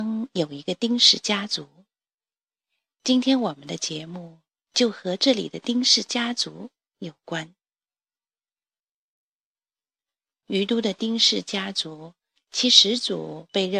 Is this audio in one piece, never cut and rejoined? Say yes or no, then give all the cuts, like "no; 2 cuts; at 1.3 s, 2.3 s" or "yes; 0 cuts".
yes; 0 cuts